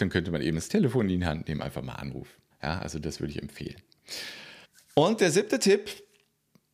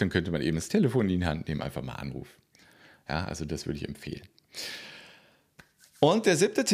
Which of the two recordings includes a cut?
first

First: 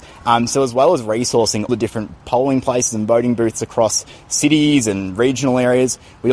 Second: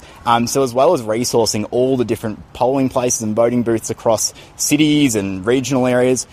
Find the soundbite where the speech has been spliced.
first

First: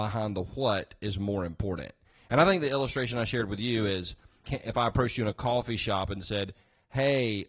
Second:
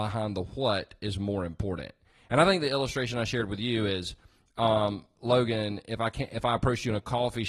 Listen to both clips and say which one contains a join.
first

